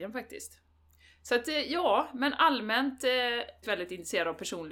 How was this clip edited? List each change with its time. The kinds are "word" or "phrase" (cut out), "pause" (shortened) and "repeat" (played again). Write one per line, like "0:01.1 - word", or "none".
0:03.6 - word